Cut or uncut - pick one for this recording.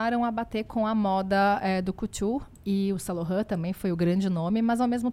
uncut